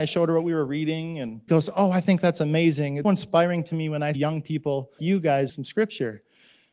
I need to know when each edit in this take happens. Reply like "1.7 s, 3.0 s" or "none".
1.5 s, 3.0 s, 4.1 s, 5.0 s, 5.5 s